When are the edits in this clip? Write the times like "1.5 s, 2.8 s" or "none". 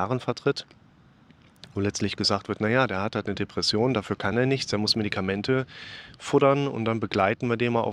none